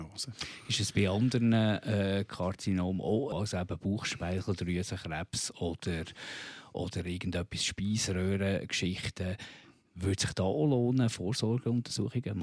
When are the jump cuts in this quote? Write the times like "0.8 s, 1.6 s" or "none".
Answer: 3.3 s